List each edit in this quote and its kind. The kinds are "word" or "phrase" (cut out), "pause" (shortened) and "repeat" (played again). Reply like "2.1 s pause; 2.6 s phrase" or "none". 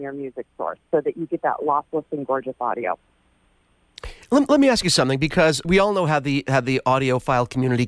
5.6 s word